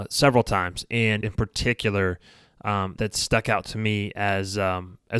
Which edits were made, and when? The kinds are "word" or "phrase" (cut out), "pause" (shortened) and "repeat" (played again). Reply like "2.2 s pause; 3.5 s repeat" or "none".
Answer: 1.2 s phrase; 3.0 s word